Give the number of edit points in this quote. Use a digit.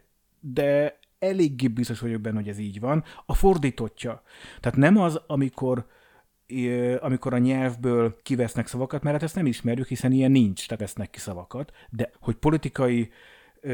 3